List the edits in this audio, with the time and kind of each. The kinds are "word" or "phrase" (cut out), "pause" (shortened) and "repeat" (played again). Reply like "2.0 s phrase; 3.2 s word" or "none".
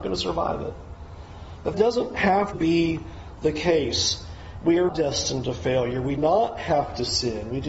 1.7 s word; 2.5 s word; 4.9 s word; 6.2 s word

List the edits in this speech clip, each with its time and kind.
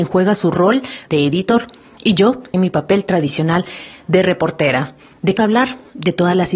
1.1 s word; 2.5 s word; 5.4 s word

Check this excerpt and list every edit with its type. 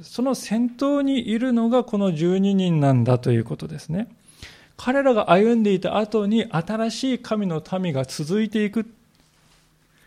none

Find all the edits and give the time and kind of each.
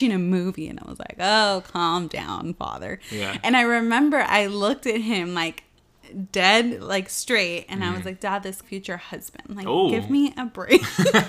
8.6 s phrase

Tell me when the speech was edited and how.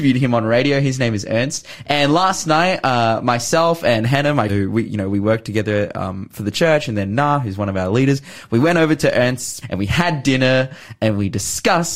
4.5 s word; 9.6 s word

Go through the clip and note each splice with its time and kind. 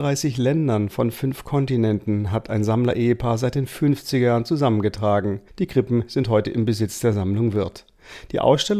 5.5 s pause

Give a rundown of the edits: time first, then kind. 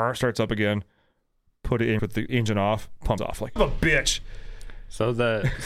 2.0 s word; 2.3 s word; 3.2 s word; 3.6 s word

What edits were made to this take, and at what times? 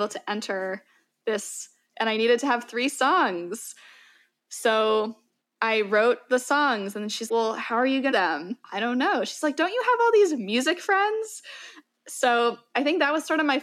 1.9 s word; 5.4 s pause; 7.3 s word; 8.1 s phrase

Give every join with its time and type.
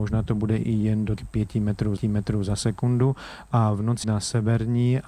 1.2 s word; 2.0 s repeat; 4.0 s phrase

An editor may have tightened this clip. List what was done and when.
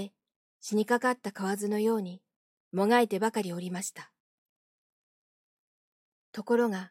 2.5 s phrase

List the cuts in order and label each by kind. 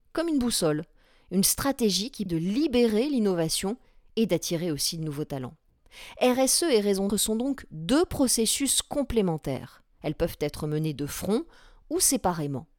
2.3 s word; 7.1 s word

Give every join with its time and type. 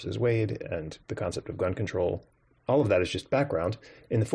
1.0 s pause

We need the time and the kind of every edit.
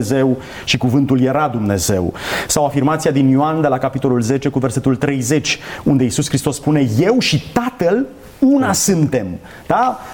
none

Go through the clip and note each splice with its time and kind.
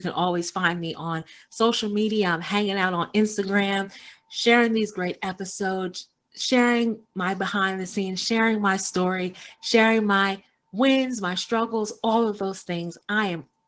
none

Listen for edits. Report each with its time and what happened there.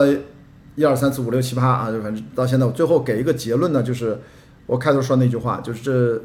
none

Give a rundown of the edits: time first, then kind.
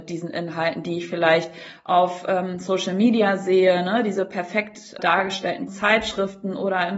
5.0 s word; 5.7 s phrase

